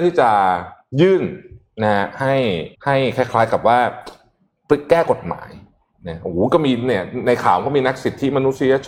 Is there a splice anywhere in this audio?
yes; 1 cut; at 2.7 s

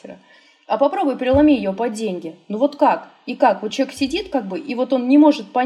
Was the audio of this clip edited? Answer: no; 0 cuts

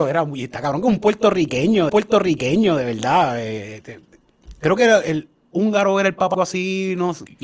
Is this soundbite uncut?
no; 2 cuts; at 1.9 s, 6.3 s

